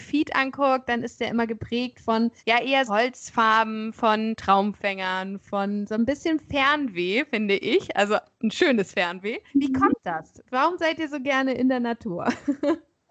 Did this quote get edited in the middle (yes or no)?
yes